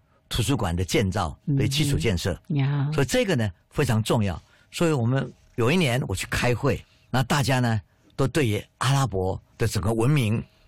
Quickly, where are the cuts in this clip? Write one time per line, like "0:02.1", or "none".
none